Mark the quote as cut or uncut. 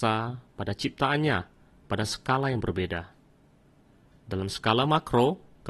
uncut